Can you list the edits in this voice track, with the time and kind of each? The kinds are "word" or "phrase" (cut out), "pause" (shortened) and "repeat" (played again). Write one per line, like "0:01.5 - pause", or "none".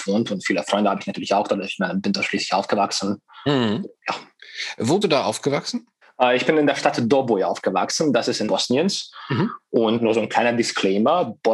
0:04.0 - pause
0:05.0 - word
0:06.0 - pause
0:08.5 - word
0:10.0 - word